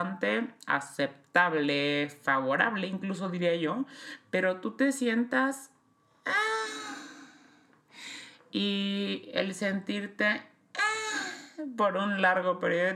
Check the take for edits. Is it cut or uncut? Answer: uncut